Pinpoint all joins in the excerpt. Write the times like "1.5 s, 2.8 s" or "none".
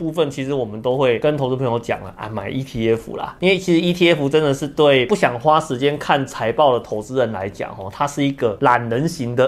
none